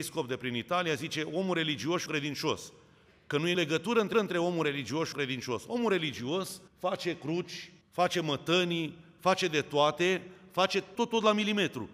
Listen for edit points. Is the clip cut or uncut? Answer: cut